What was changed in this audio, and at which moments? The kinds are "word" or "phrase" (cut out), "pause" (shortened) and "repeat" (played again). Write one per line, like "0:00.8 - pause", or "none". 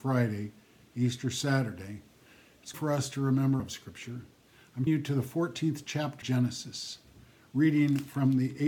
0:02.7 - word
0:03.6 - word
0:04.9 - word
0:06.2 - word